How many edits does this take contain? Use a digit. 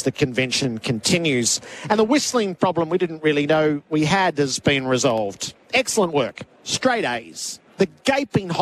2